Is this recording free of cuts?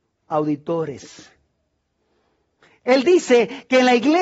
yes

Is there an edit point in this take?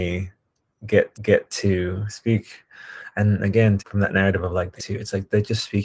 yes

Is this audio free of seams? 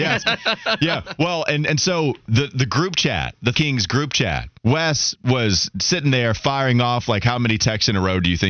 no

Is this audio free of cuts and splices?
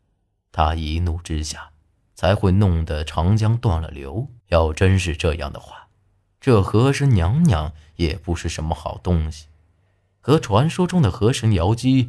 no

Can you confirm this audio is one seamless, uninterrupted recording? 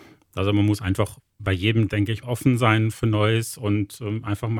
no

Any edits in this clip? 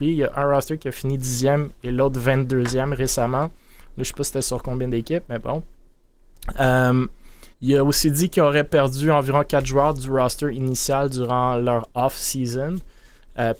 yes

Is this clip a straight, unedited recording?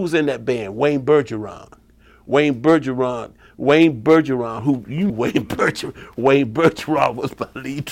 no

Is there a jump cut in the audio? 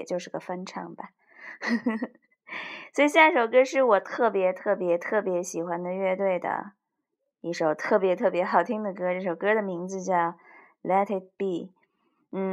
no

